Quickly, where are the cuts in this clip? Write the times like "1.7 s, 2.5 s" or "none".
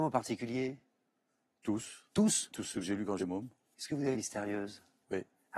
2.5 s, 3.2 s, 4.1 s